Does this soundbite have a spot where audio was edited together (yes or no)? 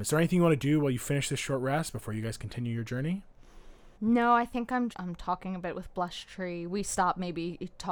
yes